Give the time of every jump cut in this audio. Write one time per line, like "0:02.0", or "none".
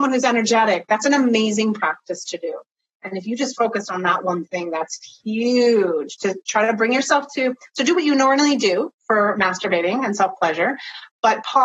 none